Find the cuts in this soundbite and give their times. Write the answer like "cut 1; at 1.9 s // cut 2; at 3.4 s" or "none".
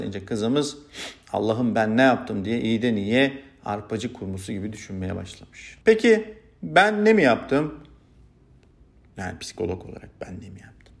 cut 1; at 5.8 s